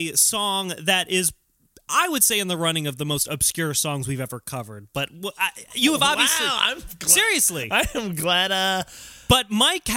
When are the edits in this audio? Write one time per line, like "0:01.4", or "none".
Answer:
none